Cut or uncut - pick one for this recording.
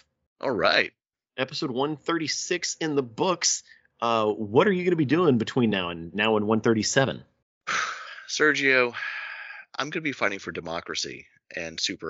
uncut